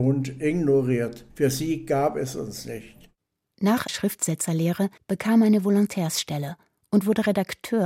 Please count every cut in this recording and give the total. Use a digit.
3